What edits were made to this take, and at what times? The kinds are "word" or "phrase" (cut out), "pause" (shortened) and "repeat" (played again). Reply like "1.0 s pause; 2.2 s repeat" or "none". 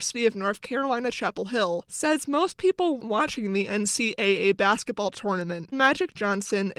3.0 s word; 5.7 s word